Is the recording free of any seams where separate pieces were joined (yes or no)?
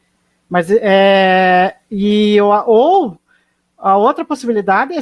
yes